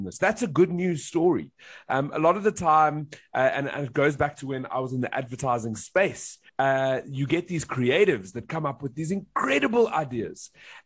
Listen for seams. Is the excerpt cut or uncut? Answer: cut